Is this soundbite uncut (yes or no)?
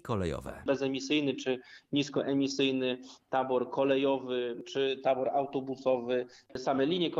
yes